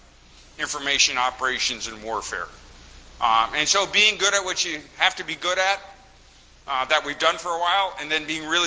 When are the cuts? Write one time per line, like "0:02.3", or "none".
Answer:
none

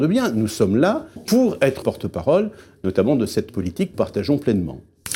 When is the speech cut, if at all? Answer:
0:01.2
0:01.8
0:03.5
0:03.9

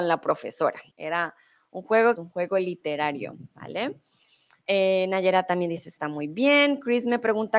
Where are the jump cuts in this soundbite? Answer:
0:00.9
0:02.2

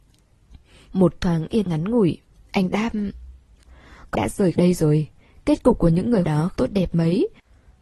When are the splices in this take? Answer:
0:01.6
0:04.1
0:04.5
0:06.2
0:06.5

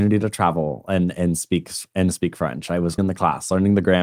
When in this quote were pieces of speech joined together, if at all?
0:03.0

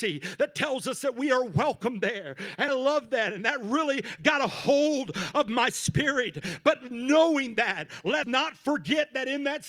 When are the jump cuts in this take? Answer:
0:02.7
0:08.2

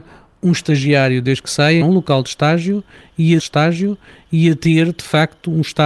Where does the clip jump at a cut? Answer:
0:01.8
0:03.4

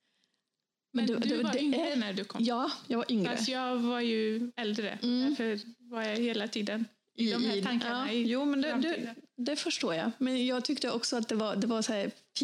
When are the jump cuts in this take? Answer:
none

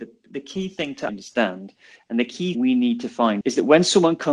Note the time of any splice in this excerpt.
0:01.1
0:02.5
0:03.4

